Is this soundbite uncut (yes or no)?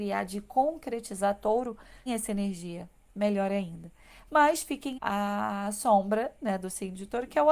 no